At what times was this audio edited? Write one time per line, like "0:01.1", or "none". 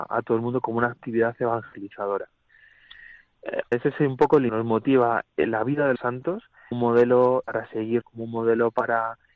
0:03.7
0:04.5
0:05.2
0:06.0
0:06.7
0:07.4
0:08.0